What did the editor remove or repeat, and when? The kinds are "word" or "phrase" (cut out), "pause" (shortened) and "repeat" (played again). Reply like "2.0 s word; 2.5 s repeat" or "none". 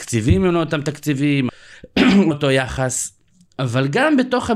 1.5 s phrase; 2.3 s word